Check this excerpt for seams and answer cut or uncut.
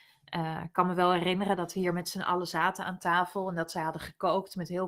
uncut